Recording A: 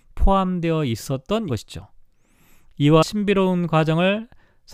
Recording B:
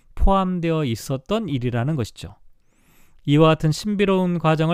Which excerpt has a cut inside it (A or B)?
A